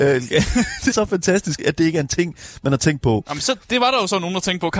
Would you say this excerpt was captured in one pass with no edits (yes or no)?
no